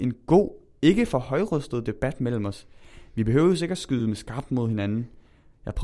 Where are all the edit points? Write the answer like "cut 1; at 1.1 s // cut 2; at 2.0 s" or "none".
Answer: none